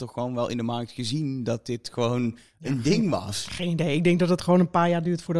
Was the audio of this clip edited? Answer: no; 0 cuts

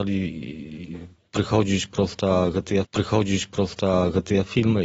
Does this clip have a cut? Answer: yes; 1 cut; at 2.8 s

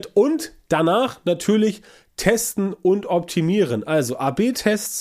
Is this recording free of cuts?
yes; 0 cuts

